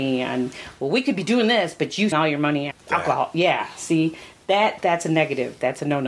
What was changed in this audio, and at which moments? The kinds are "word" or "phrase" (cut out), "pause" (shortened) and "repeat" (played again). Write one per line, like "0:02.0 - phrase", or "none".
0:02.1 - word
0:02.7 - word
0:04.8 - word